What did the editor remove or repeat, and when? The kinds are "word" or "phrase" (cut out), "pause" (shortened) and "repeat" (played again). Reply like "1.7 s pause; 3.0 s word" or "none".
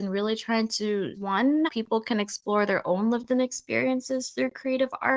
1.1 s word; 1.7 s word